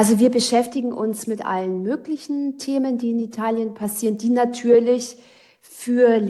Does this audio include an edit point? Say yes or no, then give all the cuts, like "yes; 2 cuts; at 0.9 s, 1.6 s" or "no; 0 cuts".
no; 0 cuts